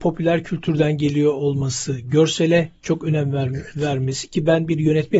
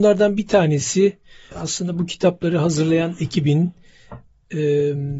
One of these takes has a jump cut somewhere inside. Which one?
second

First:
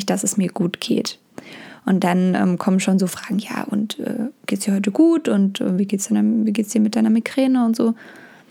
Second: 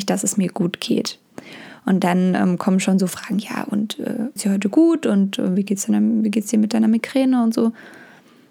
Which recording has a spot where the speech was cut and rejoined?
second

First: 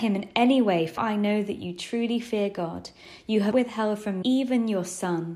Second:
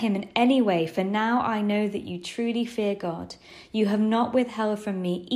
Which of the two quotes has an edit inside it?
first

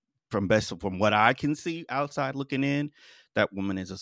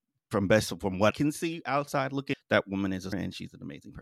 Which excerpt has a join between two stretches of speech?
second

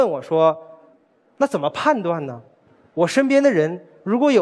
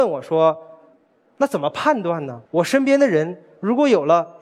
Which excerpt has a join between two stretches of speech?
second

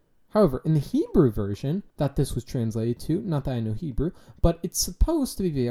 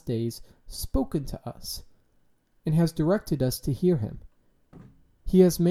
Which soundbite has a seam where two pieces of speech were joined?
first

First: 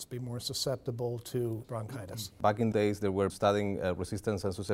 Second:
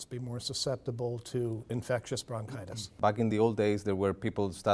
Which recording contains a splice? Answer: first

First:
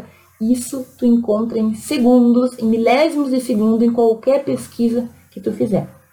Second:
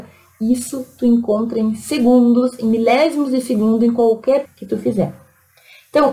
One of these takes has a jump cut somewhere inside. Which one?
second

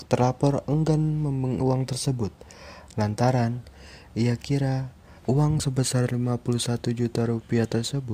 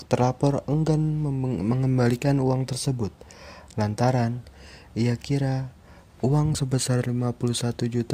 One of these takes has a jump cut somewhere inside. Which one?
first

